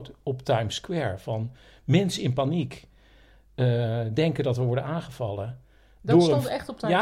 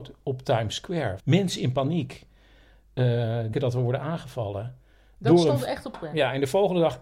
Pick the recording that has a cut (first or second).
second